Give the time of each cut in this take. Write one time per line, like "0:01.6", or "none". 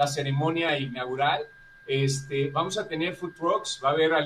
none